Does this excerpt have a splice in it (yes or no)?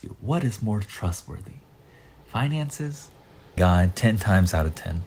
yes